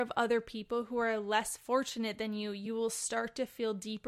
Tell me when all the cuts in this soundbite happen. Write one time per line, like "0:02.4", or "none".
none